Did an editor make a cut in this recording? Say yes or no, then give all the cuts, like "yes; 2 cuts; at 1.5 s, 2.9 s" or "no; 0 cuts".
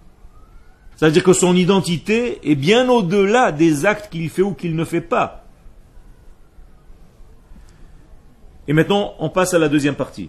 yes; 1 cut; at 0.9 s